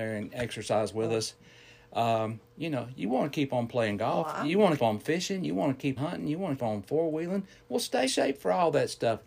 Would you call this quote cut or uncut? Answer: cut